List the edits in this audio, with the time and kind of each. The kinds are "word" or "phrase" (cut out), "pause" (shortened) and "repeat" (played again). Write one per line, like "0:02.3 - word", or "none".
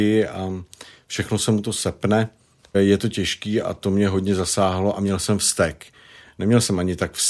0:02.7 - word